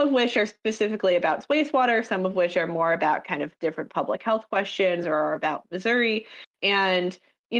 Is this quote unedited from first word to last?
yes; 0 cuts

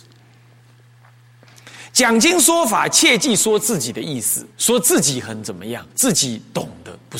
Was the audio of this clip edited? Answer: yes; 2 cuts; at 4.5 s, 5.9 s

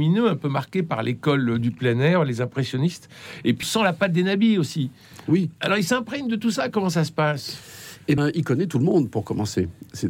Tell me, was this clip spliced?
yes; 2 cuts; at 3.6 s, 8.2 s

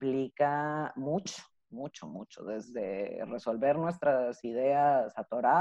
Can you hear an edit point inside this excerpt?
no; 0 cuts

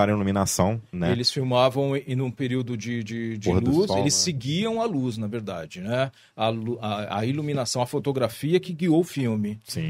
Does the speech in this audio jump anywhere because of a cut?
no; 0 cuts

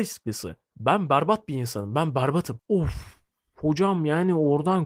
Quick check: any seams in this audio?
no; 0 cuts

